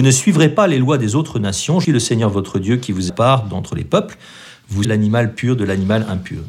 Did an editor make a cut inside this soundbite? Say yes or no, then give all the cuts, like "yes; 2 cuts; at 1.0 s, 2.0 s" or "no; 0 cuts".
yes; 3 cuts; at 1.8 s, 3.1 s, 4.8 s